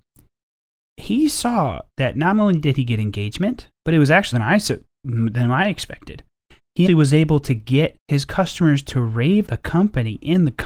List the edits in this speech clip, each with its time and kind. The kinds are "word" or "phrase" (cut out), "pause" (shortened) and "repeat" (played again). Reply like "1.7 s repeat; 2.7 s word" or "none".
4.3 s word; 6.9 s word; 9.5 s word